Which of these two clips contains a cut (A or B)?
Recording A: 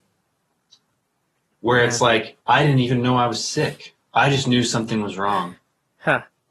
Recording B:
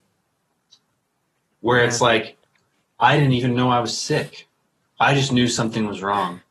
A